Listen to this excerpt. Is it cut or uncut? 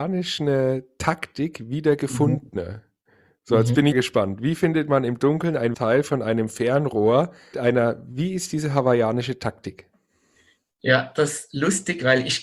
cut